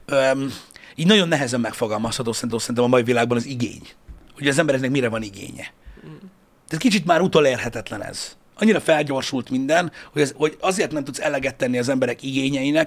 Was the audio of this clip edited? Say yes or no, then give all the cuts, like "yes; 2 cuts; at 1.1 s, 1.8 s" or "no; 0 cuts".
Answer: yes; 3 cuts; at 2.5 s, 6.0 s, 10.3 s